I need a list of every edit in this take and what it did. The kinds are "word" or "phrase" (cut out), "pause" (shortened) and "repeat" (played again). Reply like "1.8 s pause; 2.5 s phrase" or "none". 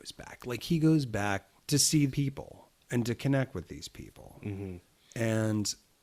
1.6 s pause; 2.1 s word